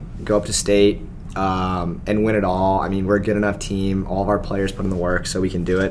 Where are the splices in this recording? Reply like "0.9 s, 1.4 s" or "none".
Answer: none